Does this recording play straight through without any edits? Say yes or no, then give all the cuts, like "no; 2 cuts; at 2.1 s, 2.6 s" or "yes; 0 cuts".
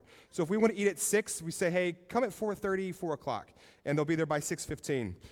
yes; 0 cuts